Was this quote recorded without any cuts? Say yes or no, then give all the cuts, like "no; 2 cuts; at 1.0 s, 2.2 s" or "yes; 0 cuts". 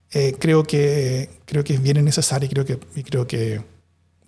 yes; 0 cuts